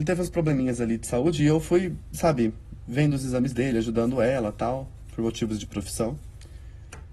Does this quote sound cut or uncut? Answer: uncut